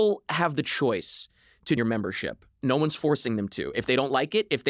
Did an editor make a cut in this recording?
yes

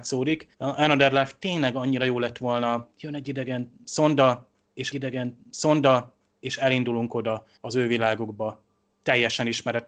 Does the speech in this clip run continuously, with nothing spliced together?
no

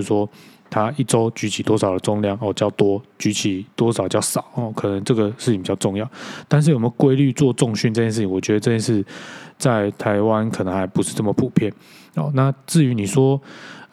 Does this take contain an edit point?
no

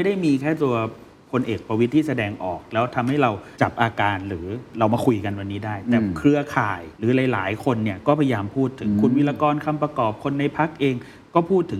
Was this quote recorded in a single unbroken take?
no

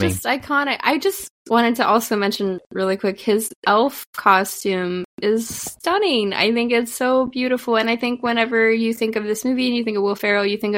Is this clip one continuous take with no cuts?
yes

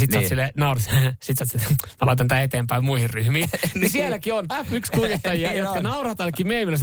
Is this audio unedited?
no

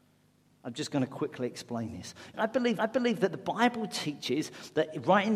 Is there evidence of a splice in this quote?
yes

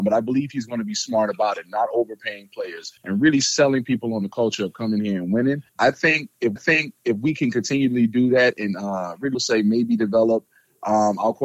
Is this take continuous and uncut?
no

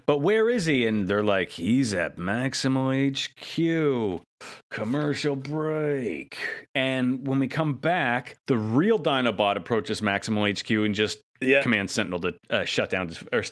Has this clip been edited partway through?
yes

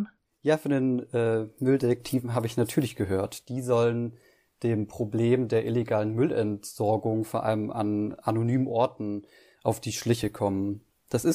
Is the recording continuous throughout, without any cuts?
yes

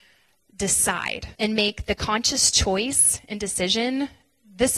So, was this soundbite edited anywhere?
yes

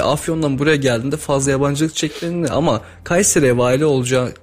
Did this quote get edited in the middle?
no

